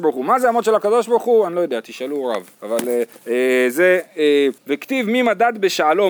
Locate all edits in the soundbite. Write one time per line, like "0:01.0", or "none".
0:03.2
0:04.6